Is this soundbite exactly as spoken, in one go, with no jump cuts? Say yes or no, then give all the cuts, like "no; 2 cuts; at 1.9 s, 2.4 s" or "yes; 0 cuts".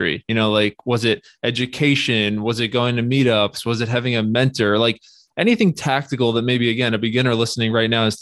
yes; 0 cuts